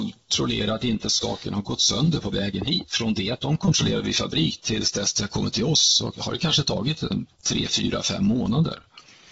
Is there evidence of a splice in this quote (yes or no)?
no